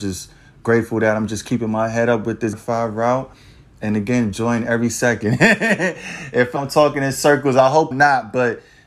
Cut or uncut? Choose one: cut